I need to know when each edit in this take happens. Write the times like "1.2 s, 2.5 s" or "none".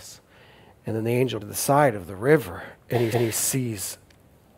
1.4 s, 2.8 s, 3.1 s